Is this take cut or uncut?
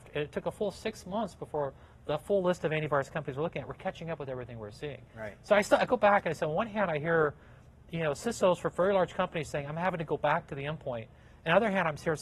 uncut